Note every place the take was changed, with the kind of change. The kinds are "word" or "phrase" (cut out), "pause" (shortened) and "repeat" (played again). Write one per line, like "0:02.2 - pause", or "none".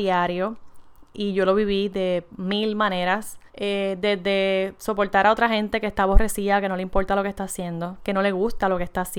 0:03.5 - pause

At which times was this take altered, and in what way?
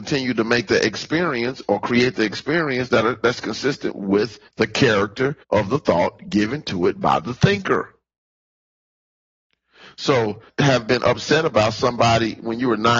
0:04.5 - pause
0:05.4 - pause
0:10.5 - phrase

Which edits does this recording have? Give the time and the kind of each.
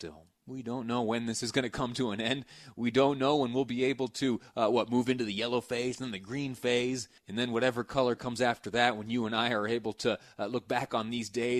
0:07.2 - pause

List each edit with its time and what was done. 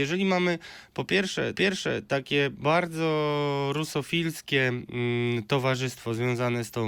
0:01.5 - repeat

